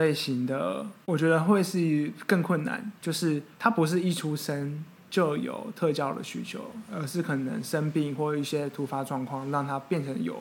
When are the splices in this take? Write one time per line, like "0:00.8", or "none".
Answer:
0:01.0
0:03.0
0:03.5